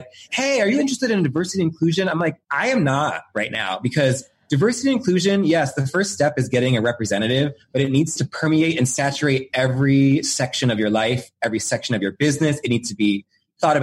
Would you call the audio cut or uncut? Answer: cut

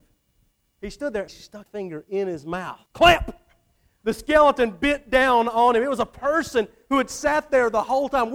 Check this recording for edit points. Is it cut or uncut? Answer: cut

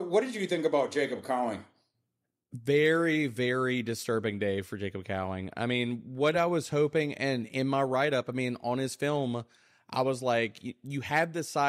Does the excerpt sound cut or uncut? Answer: uncut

